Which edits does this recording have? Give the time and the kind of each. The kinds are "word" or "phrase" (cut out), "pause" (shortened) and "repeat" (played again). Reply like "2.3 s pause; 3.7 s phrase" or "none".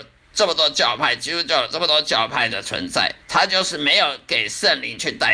3.2 s pause